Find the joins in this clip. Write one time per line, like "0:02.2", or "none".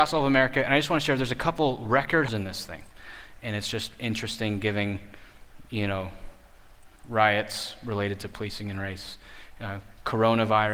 0:02.3
0:07.0